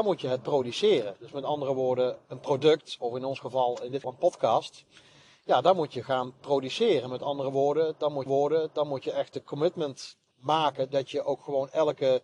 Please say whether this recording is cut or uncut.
cut